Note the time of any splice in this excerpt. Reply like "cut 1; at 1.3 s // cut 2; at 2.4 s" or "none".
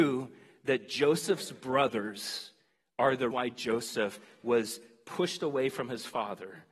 cut 1; at 3.3 s